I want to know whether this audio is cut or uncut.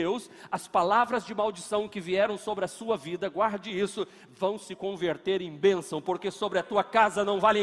uncut